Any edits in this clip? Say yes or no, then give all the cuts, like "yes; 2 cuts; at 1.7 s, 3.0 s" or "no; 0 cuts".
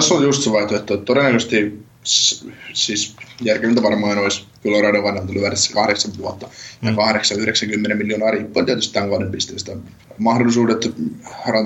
no; 0 cuts